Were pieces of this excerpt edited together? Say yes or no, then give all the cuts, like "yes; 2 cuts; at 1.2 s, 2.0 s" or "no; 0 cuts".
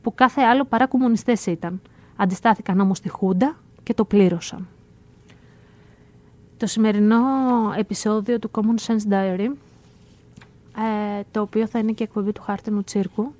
no; 0 cuts